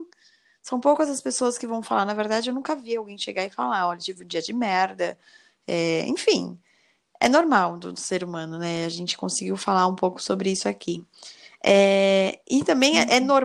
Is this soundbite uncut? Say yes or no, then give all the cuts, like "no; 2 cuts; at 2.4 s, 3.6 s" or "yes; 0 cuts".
yes; 0 cuts